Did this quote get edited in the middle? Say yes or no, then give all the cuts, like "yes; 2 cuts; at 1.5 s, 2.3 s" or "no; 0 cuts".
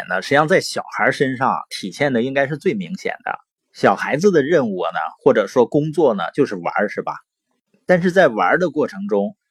no; 0 cuts